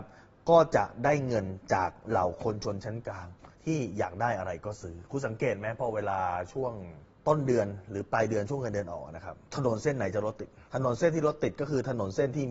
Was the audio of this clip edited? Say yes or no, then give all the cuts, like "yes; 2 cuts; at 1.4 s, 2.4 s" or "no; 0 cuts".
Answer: yes; 2 cuts; at 3.5 s, 10.7 s